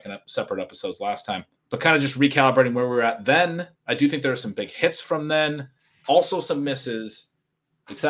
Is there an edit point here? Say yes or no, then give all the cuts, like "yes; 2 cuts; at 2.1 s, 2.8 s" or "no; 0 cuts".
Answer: yes; 1 cut; at 1.6 s